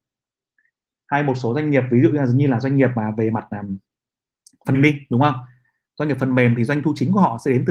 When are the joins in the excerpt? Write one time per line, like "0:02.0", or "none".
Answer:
0:04.7